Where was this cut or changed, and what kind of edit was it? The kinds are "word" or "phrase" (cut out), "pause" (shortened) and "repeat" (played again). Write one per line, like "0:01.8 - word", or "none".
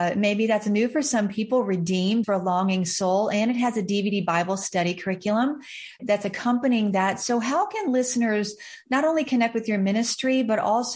0:02.2 - word
0:06.0 - word